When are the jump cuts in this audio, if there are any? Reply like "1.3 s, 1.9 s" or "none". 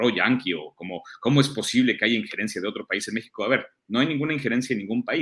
none